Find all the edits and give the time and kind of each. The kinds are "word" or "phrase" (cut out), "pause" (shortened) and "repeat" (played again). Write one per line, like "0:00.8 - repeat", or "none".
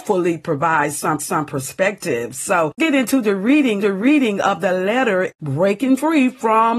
0:01.2 - repeat
0:02.8 - word
0:03.8 - repeat
0:05.3 - word